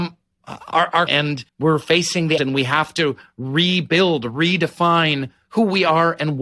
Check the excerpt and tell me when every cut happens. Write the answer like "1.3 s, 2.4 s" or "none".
1.1 s, 1.5 s, 2.4 s